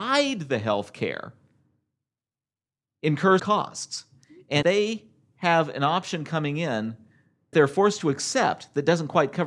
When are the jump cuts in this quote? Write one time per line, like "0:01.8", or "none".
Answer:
0:03.4
0:04.6
0:07.5